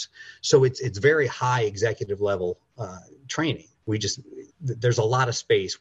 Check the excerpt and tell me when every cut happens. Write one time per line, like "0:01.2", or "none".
0:03.7
0:04.5